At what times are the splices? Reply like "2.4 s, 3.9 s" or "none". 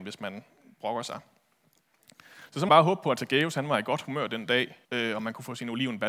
2.7 s, 4.8 s